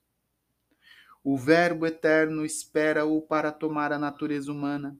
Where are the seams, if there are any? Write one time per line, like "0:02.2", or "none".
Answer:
none